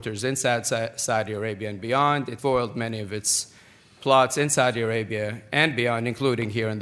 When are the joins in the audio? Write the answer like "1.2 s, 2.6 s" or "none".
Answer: 2.4 s